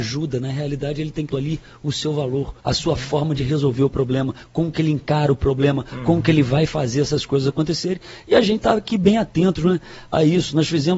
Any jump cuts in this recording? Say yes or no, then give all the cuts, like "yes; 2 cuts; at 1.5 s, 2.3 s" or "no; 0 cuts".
yes; 2 cuts; at 1.3 s, 2.6 s